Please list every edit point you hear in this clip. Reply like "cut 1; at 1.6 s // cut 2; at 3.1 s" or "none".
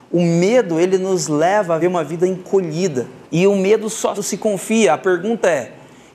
cut 1; at 1.8 s // cut 2; at 3.2 s // cut 3; at 4.1 s